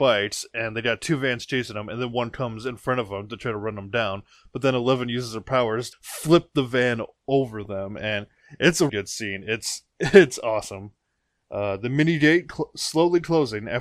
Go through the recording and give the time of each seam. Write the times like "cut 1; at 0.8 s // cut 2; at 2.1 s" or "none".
cut 1; at 5.9 s // cut 2; at 8.9 s